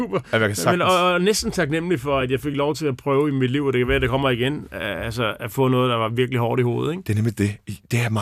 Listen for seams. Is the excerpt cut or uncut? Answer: uncut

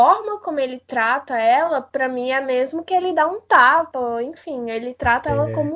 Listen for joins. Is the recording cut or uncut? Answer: uncut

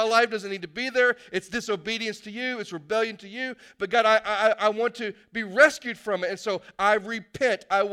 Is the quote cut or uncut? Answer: uncut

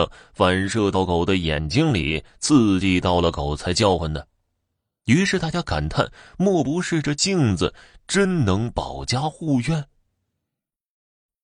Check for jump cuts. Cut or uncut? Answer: uncut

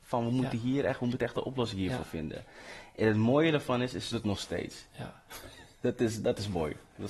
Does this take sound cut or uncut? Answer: cut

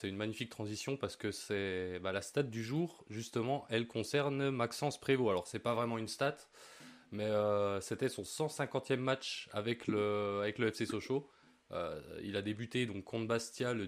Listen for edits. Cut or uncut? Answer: uncut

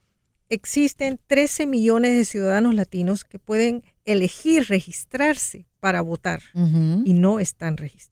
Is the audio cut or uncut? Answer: uncut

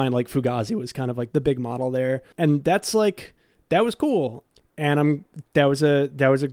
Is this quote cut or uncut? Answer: cut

